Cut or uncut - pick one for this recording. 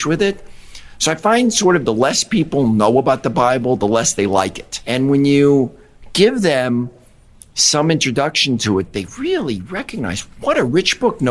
uncut